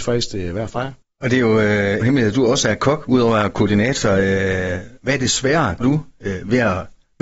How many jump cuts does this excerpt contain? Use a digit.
2